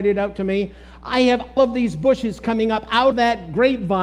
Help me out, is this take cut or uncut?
cut